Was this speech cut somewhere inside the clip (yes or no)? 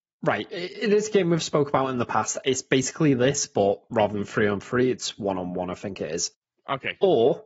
no